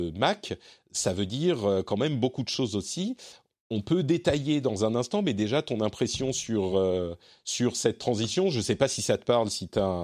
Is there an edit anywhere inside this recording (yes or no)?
no